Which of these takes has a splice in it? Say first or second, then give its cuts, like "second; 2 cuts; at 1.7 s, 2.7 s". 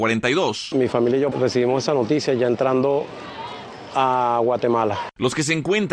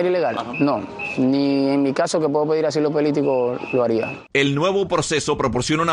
first; 1 cut; at 1.3 s